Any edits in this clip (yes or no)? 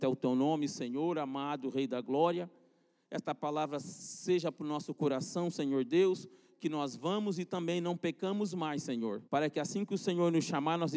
yes